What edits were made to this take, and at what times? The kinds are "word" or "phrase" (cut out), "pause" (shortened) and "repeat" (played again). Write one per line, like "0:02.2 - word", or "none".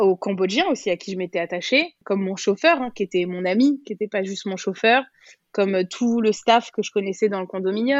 none